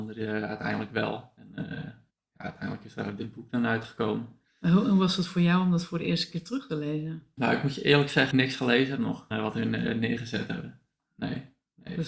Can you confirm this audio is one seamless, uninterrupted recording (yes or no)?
no